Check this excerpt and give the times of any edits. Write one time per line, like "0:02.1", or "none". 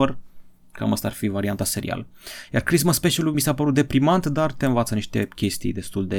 none

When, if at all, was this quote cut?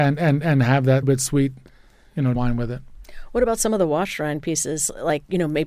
0:01.0
0:02.4

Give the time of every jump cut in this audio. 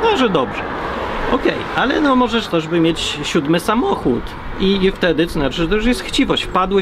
0:02.5

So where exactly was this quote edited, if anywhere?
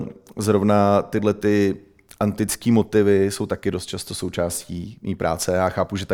none

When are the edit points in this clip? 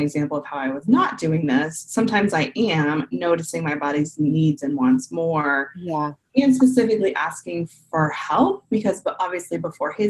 none

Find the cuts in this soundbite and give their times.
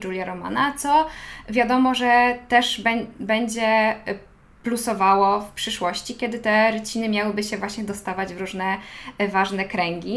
none

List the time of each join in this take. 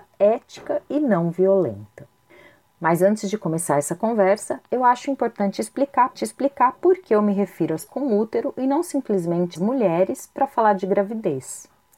0:06.2
0:07.9
0:09.6

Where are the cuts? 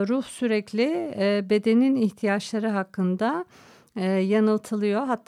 none

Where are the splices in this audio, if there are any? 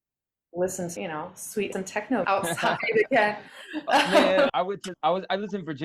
0:01.0
0:01.7
0:02.2
0:04.5
0:04.9

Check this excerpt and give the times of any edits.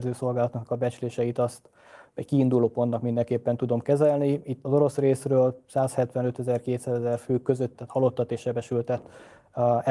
0:04.6
0:07.7

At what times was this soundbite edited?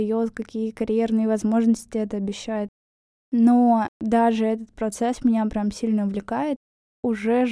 none

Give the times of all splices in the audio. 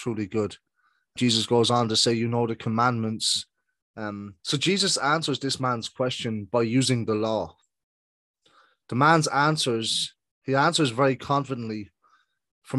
0:01.2
0:04.4

